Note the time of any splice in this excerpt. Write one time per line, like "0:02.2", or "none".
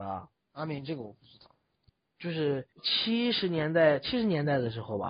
0:01.9
0:02.7